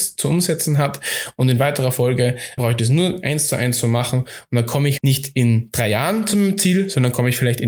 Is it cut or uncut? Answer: cut